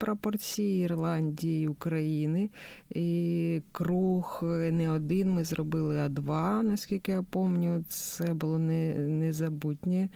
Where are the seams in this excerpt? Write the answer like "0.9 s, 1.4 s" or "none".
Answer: none